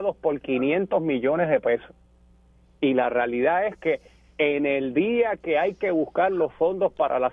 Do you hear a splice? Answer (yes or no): no